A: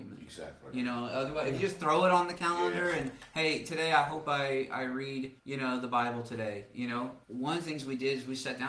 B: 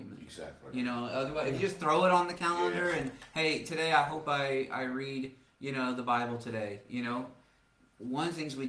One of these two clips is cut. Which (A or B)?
A